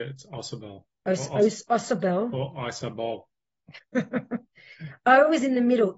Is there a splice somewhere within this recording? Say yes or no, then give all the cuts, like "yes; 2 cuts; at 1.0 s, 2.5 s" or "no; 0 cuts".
no; 0 cuts